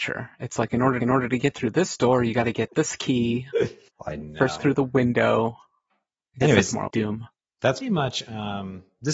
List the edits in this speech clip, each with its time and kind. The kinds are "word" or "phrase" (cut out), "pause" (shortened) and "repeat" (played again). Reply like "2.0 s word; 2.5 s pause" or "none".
1.0 s repeat; 3.9 s pause; 4.6 s word; 6.9 s word; 7.8 s word